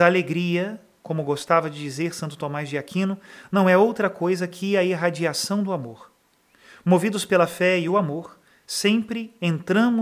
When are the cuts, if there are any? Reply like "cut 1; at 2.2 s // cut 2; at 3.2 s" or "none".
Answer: none